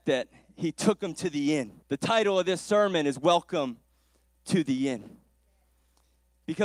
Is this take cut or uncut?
cut